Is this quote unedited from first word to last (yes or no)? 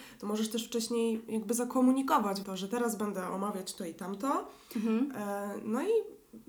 no